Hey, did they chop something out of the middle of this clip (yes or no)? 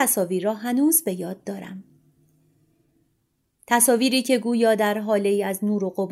no